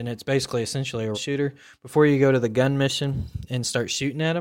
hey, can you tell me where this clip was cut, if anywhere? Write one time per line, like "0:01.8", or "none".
0:01.1